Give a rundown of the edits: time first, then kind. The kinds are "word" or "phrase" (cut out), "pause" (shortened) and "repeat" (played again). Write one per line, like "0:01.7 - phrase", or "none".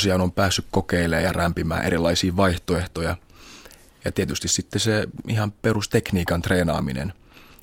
none

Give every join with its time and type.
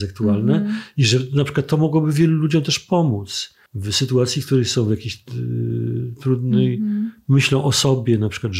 0:03.7 - pause

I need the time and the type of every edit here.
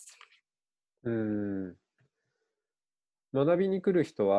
none

